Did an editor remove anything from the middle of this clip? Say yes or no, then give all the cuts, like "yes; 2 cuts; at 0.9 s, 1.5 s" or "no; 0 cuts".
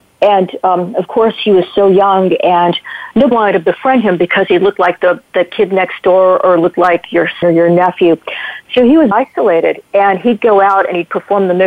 yes; 3 cuts; at 3.3 s, 7.4 s, 9.1 s